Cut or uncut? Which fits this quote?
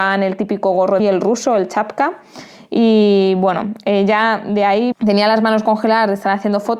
cut